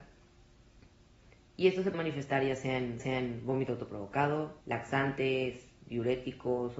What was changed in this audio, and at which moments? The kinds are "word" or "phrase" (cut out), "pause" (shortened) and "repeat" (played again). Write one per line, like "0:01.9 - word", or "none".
0:01.9 - word
0:03.0 - repeat
0:04.6 - pause